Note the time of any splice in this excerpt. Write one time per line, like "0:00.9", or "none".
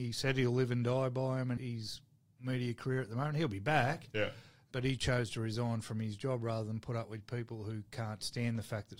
0:01.6